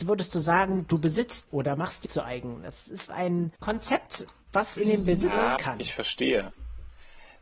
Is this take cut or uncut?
cut